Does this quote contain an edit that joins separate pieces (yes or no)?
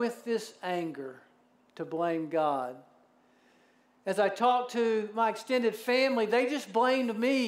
no